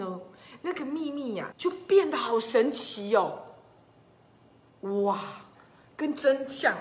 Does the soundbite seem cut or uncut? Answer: cut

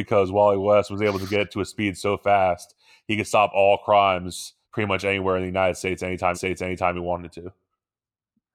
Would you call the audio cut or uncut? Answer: cut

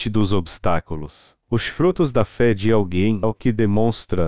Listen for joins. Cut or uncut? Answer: cut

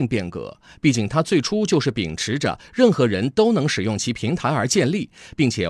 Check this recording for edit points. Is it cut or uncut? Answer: uncut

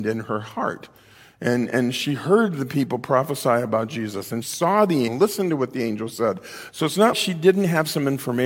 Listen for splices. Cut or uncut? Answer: cut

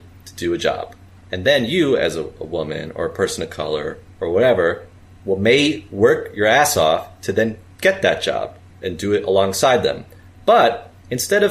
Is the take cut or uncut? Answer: uncut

